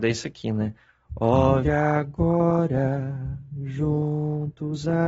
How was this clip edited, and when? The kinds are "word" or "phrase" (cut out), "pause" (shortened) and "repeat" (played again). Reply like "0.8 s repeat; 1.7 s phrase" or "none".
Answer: 1.6 s word